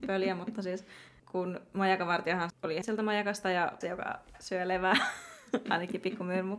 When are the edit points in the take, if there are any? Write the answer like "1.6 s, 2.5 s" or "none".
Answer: 2.5 s, 2.8 s, 3.8 s